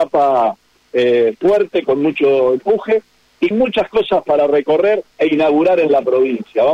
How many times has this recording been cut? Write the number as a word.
two